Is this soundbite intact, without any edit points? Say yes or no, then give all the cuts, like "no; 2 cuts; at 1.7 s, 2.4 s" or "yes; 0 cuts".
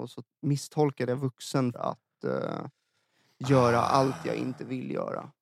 no; 1 cut; at 1.7 s